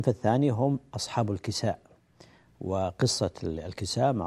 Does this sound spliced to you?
no; 0 cuts

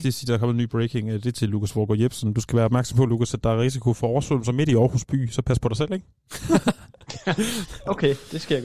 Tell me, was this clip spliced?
no; 0 cuts

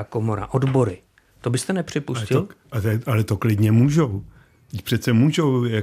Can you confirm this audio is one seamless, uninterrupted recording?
yes; 0 cuts

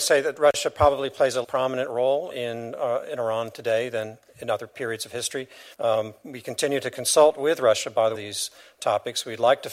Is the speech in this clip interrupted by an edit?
yes; 4 cuts; at 1.4 s, 2.3 s, 5.7 s, 8.1 s

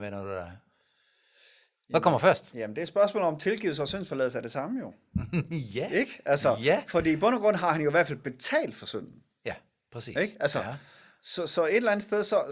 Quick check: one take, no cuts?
yes; 0 cuts

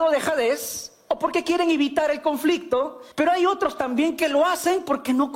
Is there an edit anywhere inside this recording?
yes; 1 cut; at 3.1 s

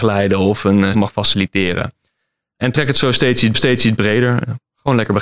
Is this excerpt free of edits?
no; 2 cuts; at 0.9 s, 3.5 s

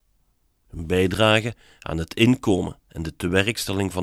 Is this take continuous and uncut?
yes; 0 cuts

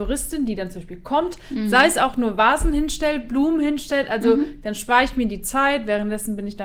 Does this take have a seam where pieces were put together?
no; 0 cuts

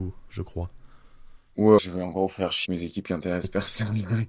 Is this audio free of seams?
no; 2 cuts; at 1.8 s, 2.7 s

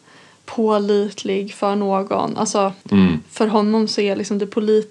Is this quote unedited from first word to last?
no; 1 cut; at 2.8 s

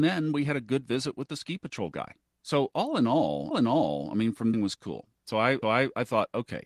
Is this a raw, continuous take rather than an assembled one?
no; 3 cuts; at 3.5 s, 4.5 s, 5.6 s

